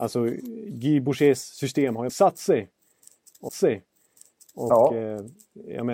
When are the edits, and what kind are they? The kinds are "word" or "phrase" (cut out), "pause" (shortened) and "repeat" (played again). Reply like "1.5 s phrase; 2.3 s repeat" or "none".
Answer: 2.1 s word; 3.5 s repeat